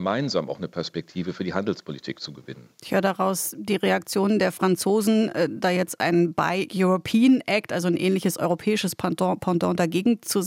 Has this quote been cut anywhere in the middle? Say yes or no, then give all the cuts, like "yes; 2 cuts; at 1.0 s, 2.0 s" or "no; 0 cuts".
no; 0 cuts